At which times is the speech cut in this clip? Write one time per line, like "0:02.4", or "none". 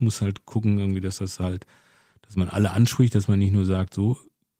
none